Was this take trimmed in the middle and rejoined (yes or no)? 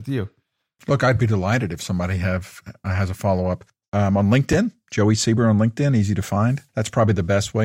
yes